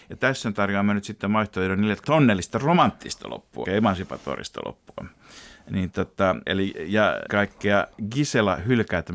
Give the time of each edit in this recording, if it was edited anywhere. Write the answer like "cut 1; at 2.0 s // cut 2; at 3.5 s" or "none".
cut 1; at 2.0 s // cut 2; at 3.6 s // cut 3; at 6.5 s // cut 4; at 7.3 s